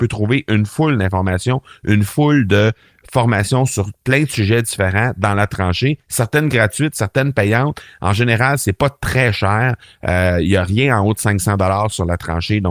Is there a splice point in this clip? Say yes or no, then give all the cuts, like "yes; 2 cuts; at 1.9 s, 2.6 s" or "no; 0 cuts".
no; 0 cuts